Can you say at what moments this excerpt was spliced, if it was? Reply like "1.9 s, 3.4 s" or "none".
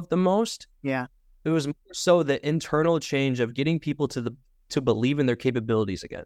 none